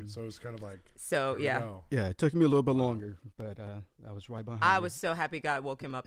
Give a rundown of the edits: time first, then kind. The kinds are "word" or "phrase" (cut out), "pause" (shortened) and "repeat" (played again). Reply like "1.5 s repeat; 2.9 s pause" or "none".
0.9 s pause